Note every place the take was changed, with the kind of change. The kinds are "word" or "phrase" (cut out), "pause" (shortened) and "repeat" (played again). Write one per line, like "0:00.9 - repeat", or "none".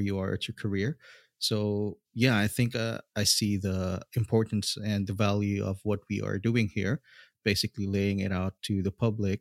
none